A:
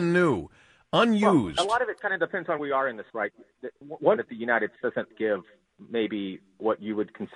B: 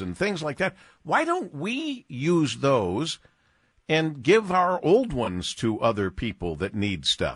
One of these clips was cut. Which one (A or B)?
A